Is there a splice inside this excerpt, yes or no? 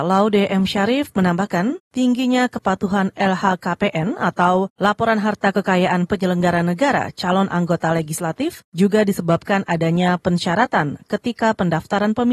no